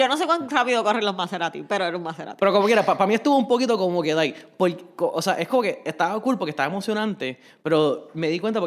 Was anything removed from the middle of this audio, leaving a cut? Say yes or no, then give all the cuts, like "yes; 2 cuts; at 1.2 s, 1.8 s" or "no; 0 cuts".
no; 0 cuts